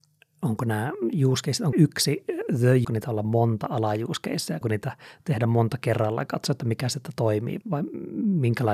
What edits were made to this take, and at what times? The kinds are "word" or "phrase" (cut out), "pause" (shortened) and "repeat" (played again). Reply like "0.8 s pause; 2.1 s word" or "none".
1.7 s word; 2.8 s phrase; 4.6 s word; 7.6 s word